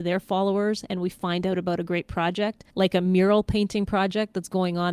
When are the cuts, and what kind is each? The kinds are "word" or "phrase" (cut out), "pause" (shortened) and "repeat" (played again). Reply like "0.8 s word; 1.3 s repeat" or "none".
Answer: 2.7 s pause